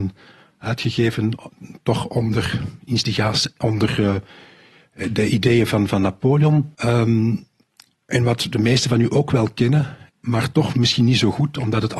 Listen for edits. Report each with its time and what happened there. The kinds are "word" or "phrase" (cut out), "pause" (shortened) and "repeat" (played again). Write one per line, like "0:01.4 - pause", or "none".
0:06.7 - pause
0:10.1 - pause